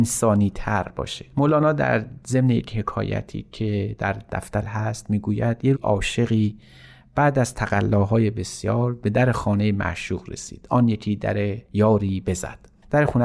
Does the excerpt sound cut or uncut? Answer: cut